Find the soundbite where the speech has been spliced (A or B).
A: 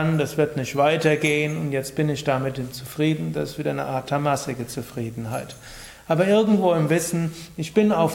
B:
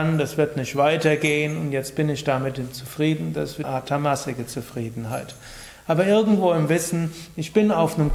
B